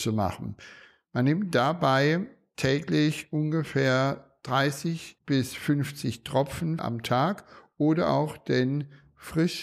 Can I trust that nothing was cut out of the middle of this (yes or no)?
no